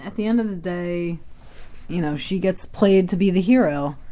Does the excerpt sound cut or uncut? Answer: uncut